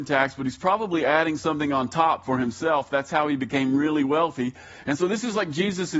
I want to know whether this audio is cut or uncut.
uncut